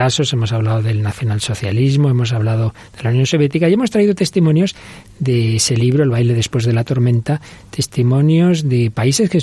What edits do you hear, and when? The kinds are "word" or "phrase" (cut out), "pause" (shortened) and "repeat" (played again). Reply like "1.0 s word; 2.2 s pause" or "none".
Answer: none